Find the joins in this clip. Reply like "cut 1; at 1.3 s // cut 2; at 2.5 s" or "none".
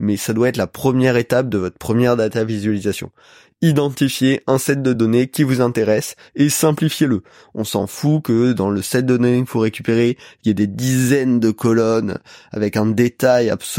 none